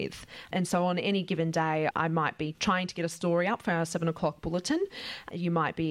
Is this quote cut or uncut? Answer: uncut